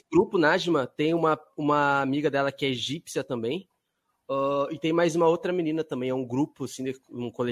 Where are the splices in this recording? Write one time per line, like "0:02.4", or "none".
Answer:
none